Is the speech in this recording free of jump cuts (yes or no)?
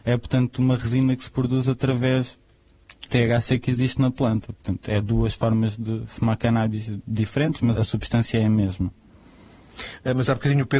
no